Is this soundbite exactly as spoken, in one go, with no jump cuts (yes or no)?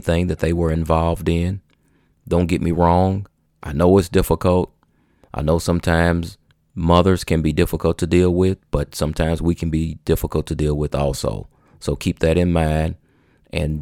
no